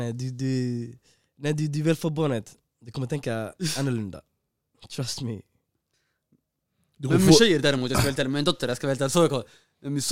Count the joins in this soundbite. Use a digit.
0